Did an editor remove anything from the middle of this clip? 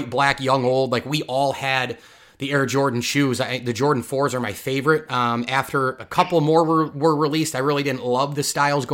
no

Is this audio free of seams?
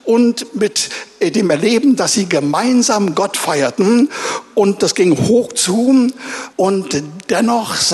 no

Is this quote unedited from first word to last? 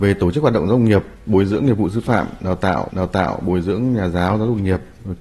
no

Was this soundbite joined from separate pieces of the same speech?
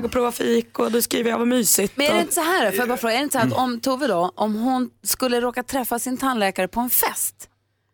no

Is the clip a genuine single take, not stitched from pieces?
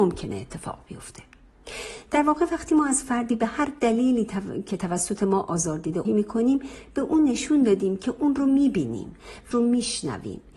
no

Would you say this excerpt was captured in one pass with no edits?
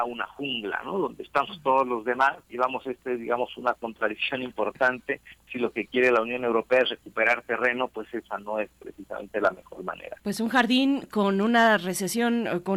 no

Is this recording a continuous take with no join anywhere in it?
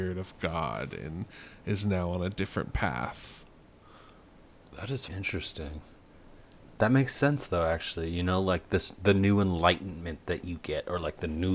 no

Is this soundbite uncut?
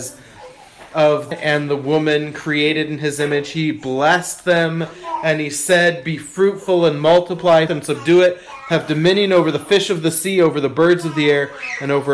no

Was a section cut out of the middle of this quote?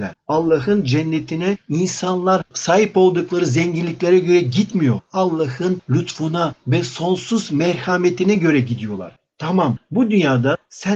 no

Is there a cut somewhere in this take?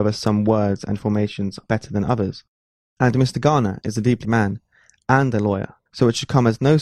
yes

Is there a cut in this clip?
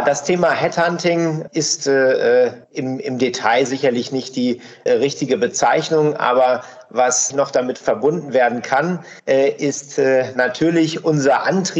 yes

